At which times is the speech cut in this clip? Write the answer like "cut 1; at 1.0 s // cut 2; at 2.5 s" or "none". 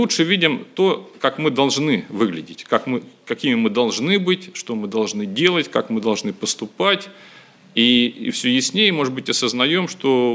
none